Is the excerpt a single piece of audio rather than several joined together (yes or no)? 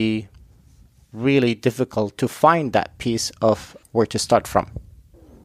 no